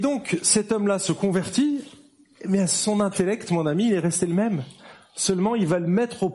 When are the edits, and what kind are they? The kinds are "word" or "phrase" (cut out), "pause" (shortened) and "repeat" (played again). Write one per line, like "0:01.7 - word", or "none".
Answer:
none